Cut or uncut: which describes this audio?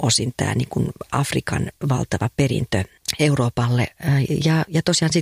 uncut